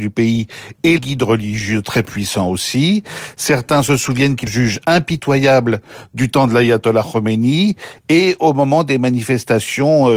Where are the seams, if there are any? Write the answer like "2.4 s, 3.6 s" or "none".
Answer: 1.0 s, 4.5 s